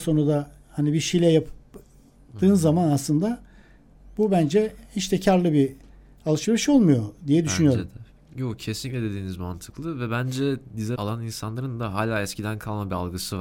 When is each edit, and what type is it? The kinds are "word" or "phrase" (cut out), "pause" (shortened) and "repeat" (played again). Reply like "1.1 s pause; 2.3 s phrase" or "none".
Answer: 11.0 s word

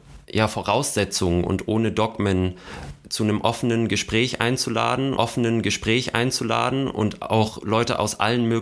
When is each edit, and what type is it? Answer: 5.2 s repeat

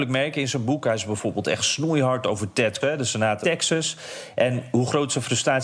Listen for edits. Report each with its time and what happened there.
2.8 s word; 3.4 s word

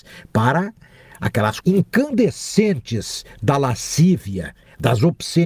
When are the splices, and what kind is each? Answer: 1.6 s word

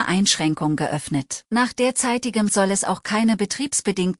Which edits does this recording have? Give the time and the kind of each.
1.5 s pause; 2.5 s word

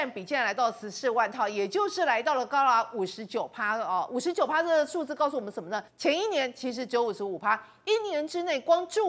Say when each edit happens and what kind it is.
5.9 s pause

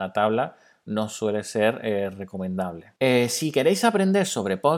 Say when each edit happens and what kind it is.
3.0 s pause

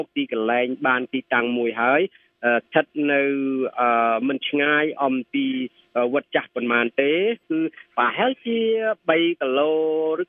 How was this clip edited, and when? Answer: 7.4 s pause

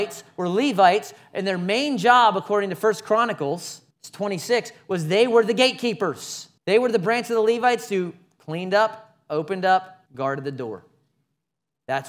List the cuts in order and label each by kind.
3.9 s pause; 6.6 s pause; 10.1 s pause

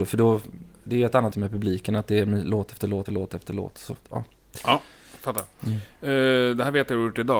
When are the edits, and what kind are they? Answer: 1.3 s word; 3.1 s word

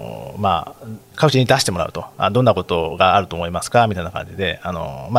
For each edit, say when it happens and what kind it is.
1.0 s pause

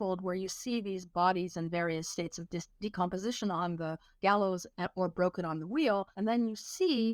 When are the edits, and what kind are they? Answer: 6.1 s pause

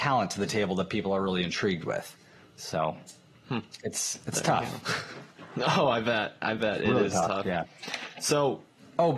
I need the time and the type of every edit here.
none

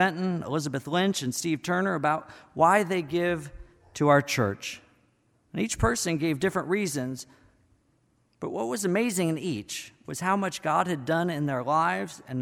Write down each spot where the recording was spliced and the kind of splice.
none

